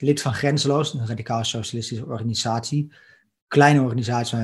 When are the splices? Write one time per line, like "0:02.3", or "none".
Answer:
none